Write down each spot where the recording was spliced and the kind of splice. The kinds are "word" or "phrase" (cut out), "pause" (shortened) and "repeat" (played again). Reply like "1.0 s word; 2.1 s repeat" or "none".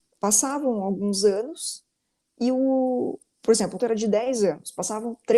3.8 s word